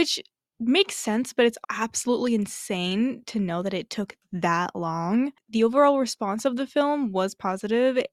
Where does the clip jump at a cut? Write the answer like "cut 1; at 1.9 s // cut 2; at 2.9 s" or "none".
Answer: cut 1; at 1.6 s